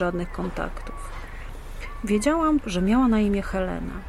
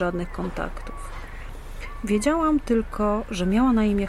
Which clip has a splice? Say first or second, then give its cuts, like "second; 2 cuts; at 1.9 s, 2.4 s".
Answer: first; 1 cut; at 2.6 s